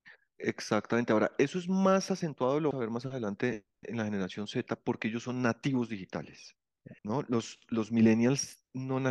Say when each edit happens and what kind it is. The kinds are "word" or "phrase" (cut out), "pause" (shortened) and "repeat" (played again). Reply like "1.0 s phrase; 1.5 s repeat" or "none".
2.7 s word; 7.0 s pause